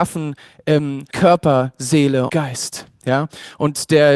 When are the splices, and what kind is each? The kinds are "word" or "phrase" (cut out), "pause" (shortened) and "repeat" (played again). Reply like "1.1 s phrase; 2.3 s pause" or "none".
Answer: 1.1 s word; 2.3 s word